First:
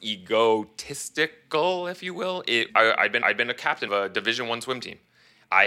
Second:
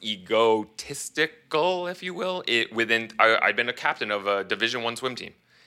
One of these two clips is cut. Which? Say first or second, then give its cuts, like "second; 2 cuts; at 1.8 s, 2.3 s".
first; 3 cuts; at 2.7 s, 3.2 s, 3.9 s